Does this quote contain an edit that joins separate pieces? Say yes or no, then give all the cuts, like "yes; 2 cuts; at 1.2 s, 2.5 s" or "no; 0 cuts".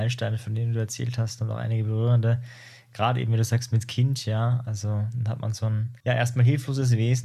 yes; 1 cut; at 6.0 s